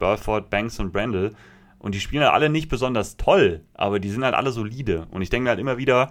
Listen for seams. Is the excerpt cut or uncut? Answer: uncut